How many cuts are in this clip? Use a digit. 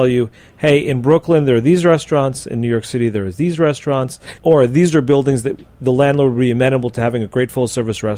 1